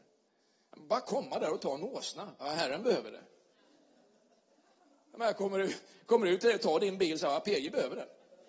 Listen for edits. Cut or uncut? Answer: uncut